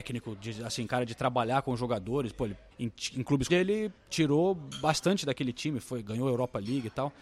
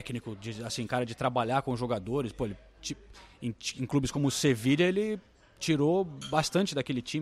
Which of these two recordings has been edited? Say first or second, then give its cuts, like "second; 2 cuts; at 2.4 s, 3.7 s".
first; 3 cuts; at 2.7 s, 3.5 s, 4.0 s